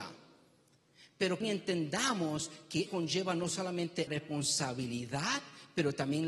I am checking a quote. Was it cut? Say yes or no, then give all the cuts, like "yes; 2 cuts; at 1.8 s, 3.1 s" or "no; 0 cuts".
yes; 3 cuts; at 1.4 s, 2.9 s, 4.1 s